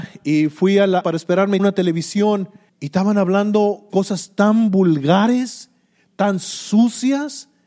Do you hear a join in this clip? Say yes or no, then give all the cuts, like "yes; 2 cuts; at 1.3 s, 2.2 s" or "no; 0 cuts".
yes; 4 cuts; at 1.0 s, 1.6 s, 2.7 s, 3.9 s